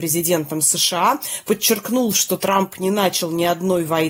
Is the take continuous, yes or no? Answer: yes